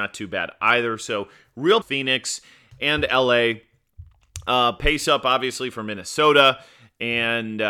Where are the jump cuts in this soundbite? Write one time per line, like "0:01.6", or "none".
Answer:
0:01.8